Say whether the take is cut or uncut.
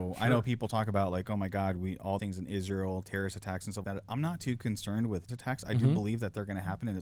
cut